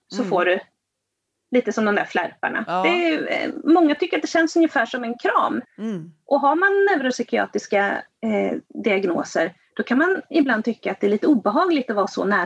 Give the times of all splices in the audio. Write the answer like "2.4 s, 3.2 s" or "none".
5.6 s